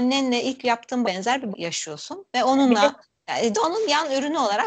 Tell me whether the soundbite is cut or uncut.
cut